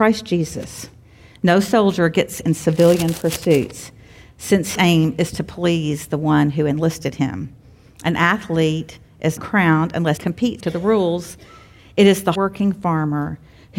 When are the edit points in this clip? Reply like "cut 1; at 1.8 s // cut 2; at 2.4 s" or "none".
cut 1; at 2.4 s // cut 2; at 4.7 s // cut 3; at 9.4 s // cut 4; at 10.2 s // cut 5; at 10.6 s // cut 6; at 12.3 s